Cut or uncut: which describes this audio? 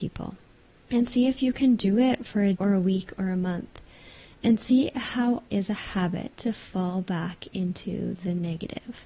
cut